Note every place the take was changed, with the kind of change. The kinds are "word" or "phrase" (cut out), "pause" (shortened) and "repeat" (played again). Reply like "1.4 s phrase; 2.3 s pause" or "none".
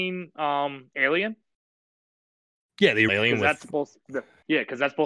3.1 s word